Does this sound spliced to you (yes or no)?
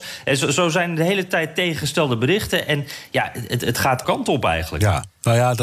yes